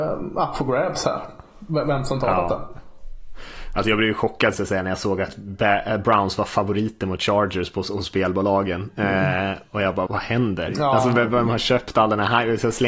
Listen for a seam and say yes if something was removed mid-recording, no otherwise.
yes